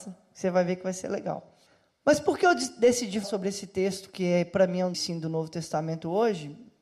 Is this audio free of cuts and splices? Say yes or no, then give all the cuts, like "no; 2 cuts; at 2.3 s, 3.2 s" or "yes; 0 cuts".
no; 3 cuts; at 1.7 s, 3.2 s, 4.9 s